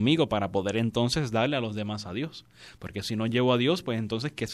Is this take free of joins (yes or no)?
yes